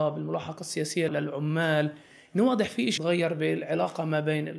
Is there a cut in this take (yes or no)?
yes